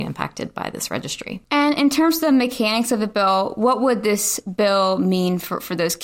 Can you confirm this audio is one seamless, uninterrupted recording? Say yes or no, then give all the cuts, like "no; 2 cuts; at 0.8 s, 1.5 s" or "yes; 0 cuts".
no; 1 cut; at 1.4 s